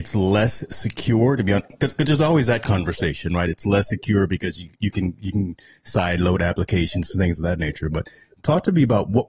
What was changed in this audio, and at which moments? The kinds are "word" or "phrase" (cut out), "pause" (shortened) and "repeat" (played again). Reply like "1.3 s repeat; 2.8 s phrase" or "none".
none

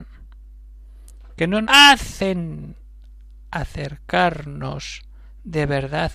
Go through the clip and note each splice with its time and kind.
1.6 s word

